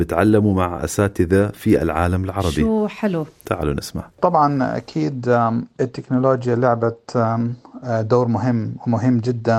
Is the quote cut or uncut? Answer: cut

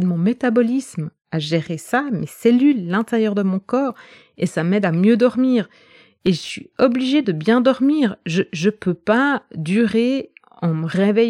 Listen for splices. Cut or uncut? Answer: uncut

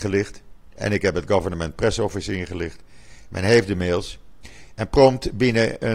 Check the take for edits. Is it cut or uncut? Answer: uncut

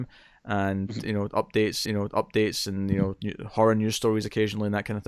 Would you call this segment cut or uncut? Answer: cut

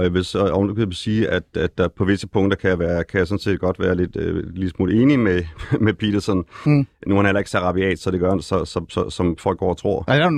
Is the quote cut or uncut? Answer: uncut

